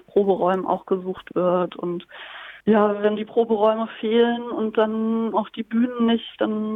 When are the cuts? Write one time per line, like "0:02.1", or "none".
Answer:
0:02.6
0:03.2
0:05.3